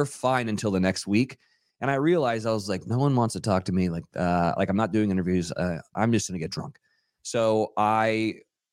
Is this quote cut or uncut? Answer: uncut